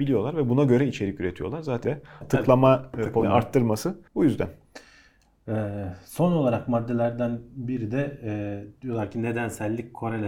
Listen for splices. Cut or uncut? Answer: cut